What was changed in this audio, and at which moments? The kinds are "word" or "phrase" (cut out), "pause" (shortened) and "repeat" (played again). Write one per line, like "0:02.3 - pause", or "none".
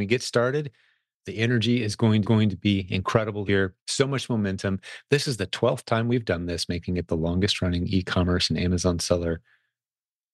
0:02.2 - repeat
0:03.5 - word
0:03.8 - pause